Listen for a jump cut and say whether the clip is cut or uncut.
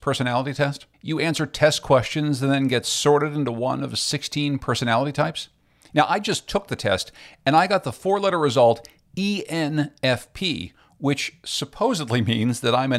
cut